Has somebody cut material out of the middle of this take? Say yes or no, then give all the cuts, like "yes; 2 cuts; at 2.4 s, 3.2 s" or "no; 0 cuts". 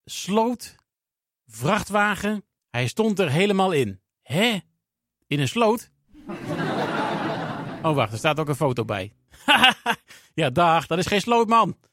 yes; 3 cuts; at 2.6 s, 4.1 s, 9.3 s